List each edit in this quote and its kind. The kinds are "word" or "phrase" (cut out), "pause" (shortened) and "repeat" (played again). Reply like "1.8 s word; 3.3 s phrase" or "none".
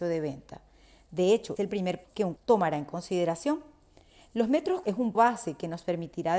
1.6 s word; 2.0 s word; 2.4 s word; 4.8 s word; 5.1 s word